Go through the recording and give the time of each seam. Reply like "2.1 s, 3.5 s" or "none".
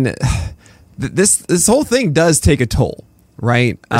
none